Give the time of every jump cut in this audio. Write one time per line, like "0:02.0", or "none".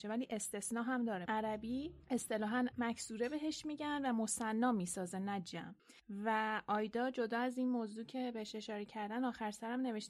0:01.2
0:02.7